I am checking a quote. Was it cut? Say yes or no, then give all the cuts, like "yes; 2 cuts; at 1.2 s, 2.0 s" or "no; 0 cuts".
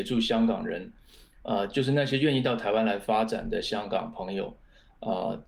no; 0 cuts